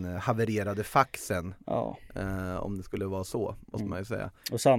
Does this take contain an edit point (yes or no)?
no